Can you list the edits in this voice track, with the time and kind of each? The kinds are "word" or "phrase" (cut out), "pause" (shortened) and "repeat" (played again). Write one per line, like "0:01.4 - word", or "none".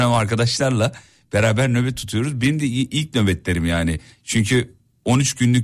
none